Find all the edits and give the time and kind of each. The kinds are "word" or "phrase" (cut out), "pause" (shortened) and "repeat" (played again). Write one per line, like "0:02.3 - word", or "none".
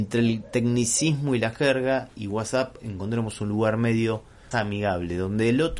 0:04.5 - word